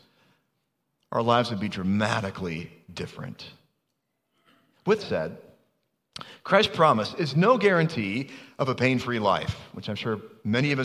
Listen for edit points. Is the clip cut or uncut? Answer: cut